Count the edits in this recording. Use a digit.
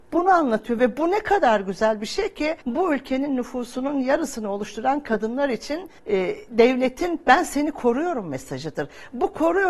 2